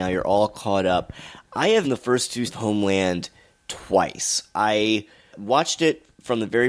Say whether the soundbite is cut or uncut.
cut